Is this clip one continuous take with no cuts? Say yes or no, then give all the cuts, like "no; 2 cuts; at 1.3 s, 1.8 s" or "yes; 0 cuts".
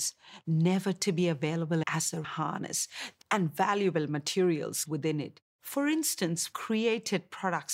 no; 6 cuts; at 1.8 s, 2.2 s, 3.2 s, 4.9 s, 5.5 s, 6.5 s